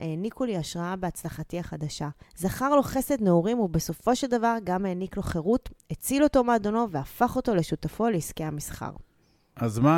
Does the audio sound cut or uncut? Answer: cut